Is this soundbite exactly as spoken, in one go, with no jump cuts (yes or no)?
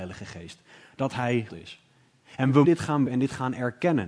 no